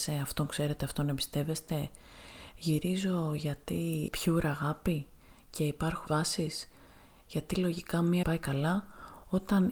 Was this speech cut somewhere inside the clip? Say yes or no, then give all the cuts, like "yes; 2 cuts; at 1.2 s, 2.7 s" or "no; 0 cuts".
yes; 3 cuts; at 4.1 s, 6.1 s, 8.2 s